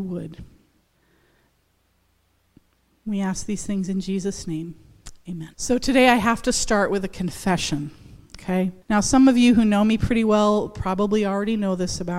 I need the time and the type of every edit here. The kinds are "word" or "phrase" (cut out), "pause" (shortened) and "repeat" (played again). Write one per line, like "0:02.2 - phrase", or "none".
0:05.5 - pause
0:08.8 - pause